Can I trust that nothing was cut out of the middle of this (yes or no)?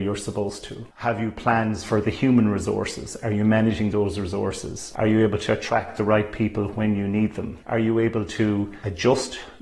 yes